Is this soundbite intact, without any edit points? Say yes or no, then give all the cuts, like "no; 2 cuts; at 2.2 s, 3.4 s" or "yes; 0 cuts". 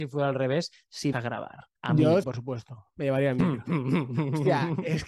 no; 3 cuts; at 1.1 s, 1.8 s, 2.2 s